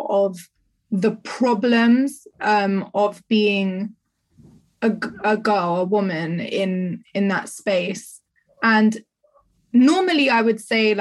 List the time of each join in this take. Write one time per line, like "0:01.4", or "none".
none